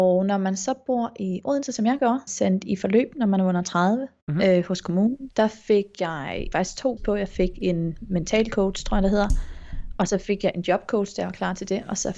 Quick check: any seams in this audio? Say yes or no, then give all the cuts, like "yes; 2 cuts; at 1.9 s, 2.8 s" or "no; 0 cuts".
yes; 4 cuts; at 2.3 s, 5.3 s, 6.5 s, 7.0 s